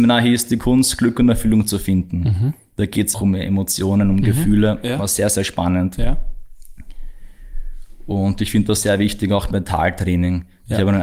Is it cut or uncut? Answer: cut